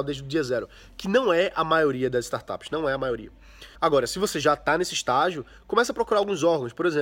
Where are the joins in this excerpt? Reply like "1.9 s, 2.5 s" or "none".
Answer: 3.7 s